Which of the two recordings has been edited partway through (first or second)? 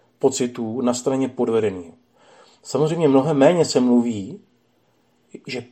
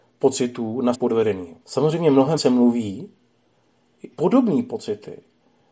second